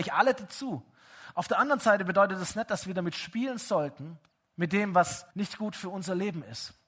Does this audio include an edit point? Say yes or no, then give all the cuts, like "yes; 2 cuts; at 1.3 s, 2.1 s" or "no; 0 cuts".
yes; 2 cuts; at 4.3 s, 5.3 s